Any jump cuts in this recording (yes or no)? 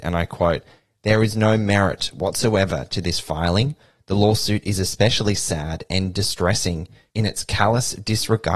no